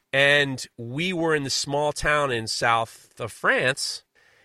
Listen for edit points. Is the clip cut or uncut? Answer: uncut